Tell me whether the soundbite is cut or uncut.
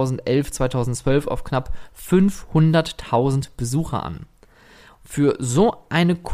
uncut